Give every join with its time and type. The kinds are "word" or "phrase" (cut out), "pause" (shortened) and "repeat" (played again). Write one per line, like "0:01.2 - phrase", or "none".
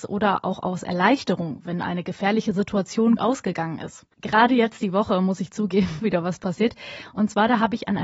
0:03.2 - word
0:04.1 - pause
0:06.0 - phrase
0:06.4 - word